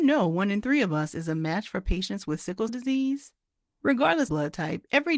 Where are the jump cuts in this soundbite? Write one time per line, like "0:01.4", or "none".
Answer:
0:02.7
0:04.3